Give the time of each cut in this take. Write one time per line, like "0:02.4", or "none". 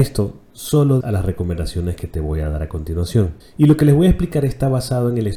0:01.0
0:03.4